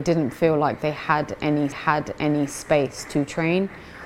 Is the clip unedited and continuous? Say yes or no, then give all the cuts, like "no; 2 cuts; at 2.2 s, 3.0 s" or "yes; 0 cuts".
no; 1 cut; at 1.7 s